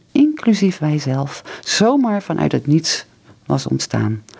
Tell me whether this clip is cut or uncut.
uncut